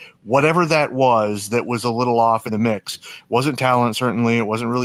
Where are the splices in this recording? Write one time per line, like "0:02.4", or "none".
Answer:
none